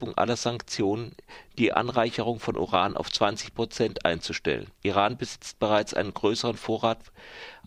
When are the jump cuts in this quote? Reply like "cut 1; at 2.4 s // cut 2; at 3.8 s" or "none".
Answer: cut 1; at 4.7 s